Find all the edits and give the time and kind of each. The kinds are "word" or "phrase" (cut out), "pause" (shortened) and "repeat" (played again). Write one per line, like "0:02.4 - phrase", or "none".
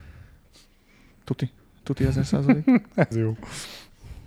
0:03.1 - word